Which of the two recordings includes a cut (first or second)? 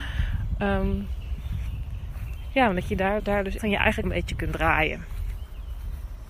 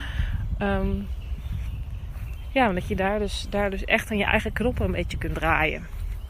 first